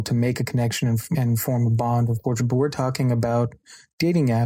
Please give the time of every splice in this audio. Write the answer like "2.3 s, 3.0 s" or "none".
1.1 s, 2.4 s